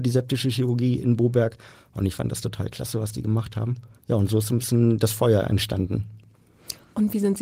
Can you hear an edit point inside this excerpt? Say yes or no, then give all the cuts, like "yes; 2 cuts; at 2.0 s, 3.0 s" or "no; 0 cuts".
yes; 1 cut; at 4.0 s